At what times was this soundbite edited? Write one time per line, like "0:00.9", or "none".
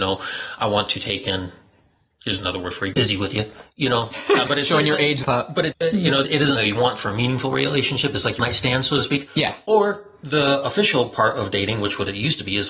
0:02.9
0:04.5
0:05.2
0:05.7
0:06.2
0:06.6
0:08.4